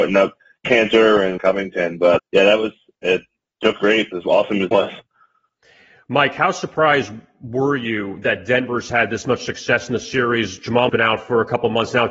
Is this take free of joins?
no; 6 cuts; at 1.4 s, 2.2 s, 3.8 s, 4.1 s, 4.7 s, 10.9 s

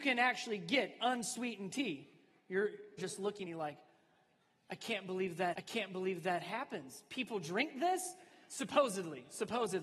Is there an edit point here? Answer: yes; 3 cuts; at 3.0 s, 3.5 s, 5.5 s

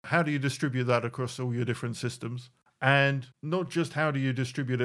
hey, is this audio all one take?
yes; 0 cuts

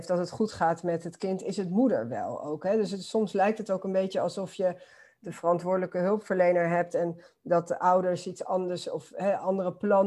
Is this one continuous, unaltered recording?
yes; 0 cuts

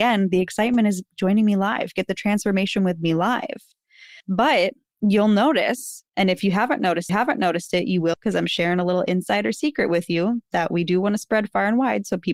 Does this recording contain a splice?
yes; 4 cuts; at 4.2 s, 6.1 s, 7.1 s, 8.1 s

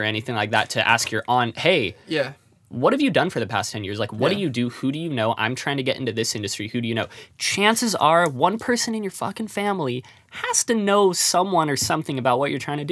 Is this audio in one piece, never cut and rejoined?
yes; 0 cuts

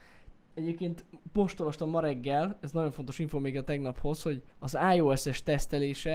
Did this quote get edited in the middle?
yes; 1 cut; at 4.5 s

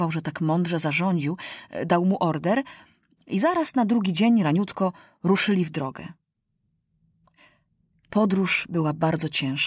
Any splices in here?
no; 0 cuts

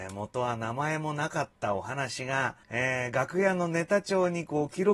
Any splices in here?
yes; 1 cut; at 2.6 s

